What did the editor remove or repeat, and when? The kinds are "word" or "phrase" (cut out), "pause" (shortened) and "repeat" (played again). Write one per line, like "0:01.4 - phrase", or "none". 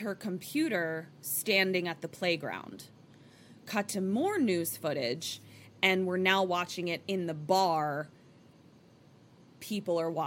none